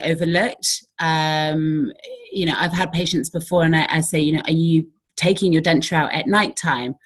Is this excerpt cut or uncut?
uncut